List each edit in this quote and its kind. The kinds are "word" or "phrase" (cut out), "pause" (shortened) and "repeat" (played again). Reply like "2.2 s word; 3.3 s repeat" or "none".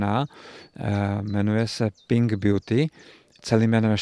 none